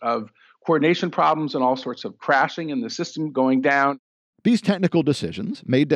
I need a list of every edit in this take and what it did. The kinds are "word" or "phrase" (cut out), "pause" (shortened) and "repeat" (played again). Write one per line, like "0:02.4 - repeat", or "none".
none